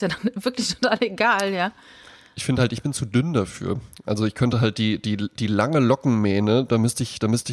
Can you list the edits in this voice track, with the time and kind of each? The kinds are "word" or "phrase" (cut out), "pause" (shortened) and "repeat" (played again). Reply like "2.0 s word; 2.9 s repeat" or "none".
none

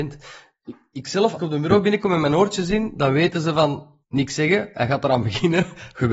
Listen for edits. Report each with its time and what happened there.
1.4 s word; 4.0 s pause

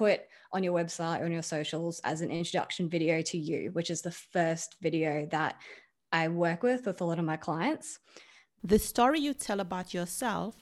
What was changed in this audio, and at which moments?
none

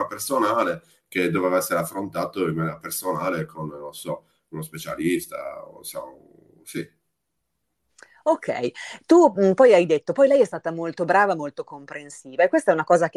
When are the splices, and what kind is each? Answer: none

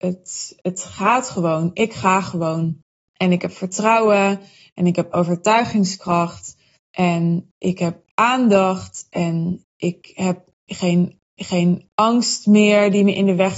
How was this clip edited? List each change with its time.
6.8 s pause; 11.2 s repeat

